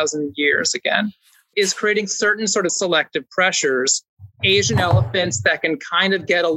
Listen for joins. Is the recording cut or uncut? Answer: cut